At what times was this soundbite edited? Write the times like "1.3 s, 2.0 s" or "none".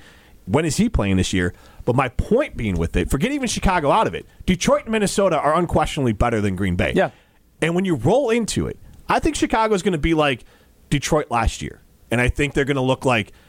none